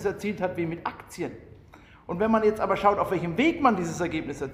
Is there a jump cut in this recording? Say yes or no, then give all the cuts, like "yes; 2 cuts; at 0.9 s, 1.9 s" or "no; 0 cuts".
no; 0 cuts